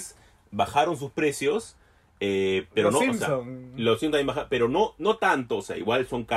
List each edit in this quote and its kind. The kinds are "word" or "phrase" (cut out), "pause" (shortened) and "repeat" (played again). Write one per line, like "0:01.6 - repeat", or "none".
none